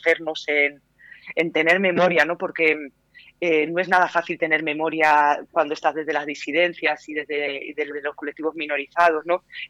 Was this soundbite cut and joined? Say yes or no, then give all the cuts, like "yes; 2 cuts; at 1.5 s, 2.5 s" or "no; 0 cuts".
no; 0 cuts